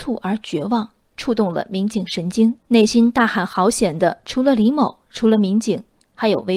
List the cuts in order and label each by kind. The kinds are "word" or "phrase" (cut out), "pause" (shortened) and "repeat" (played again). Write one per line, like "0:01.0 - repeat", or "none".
0:02.6 - pause

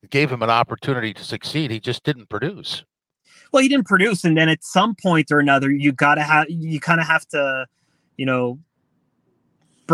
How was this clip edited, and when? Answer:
none

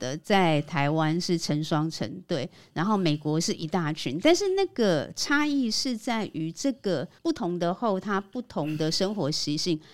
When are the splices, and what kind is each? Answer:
0:07.2 - pause

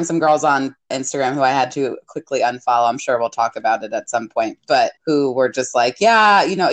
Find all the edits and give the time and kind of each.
0:00.9 - word
0:05.0 - pause

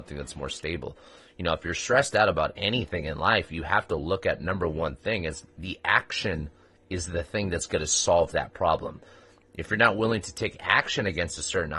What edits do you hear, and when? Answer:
none

